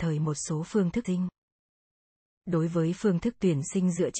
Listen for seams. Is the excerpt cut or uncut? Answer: cut